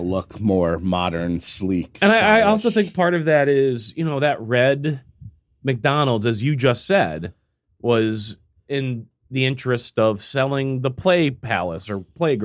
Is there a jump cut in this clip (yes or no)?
no